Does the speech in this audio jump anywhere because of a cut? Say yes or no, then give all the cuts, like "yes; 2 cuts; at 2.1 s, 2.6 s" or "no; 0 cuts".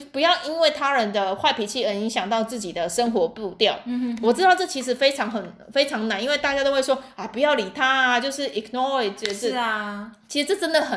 no; 0 cuts